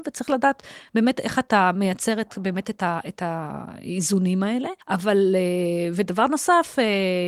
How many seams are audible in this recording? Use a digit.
1